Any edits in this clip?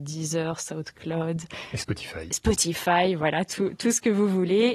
no; 0 cuts

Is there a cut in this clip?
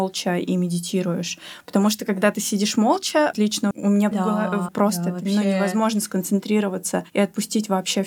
yes; 4 cuts; at 3.3 s, 3.7 s, 4.1 s, 4.7 s

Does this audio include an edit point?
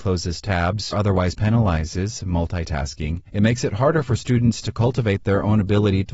yes; 2 cuts; at 0.9 s, 3.3 s

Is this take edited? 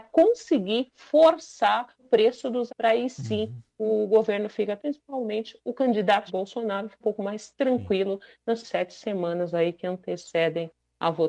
yes; 6 cuts; at 2.0 s, 2.7 s, 4.8 s, 6.3 s, 7.0 s, 8.6 s

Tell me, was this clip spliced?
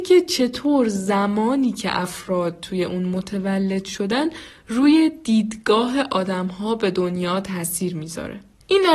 no; 0 cuts

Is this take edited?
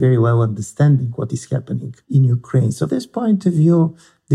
yes; 2 cuts; at 2.0 s, 2.9 s

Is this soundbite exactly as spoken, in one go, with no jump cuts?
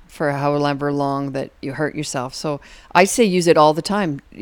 yes; 0 cuts

